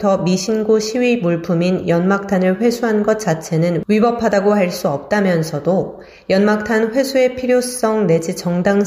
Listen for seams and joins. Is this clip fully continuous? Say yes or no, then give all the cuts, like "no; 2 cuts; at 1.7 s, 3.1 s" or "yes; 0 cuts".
yes; 0 cuts